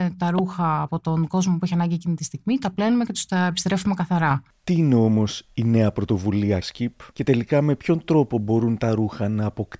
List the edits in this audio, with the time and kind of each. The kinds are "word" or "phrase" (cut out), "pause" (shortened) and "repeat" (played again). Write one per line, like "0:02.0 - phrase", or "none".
0:06.6 - phrase